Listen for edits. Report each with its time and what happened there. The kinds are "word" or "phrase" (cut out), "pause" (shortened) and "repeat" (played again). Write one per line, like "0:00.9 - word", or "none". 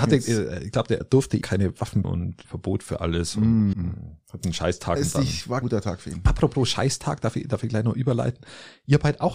0:01.0 - word
0:01.4 - word
0:02.0 - word
0:02.4 - word
0:03.7 - word
0:05.0 - word
0:05.6 - word